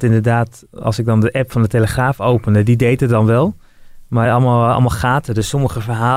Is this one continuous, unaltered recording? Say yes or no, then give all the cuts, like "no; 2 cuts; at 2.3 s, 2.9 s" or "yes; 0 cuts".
yes; 0 cuts